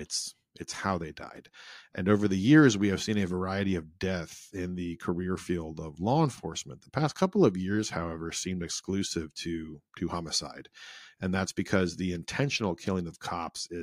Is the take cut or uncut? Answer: cut